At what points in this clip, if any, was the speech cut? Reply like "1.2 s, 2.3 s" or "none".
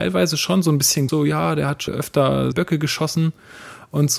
1.1 s, 1.9 s, 2.5 s